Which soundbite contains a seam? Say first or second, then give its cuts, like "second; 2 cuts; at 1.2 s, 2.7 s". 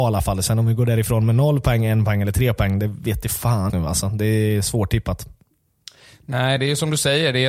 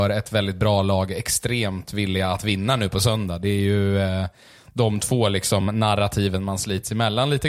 first; 1 cut; at 3.7 s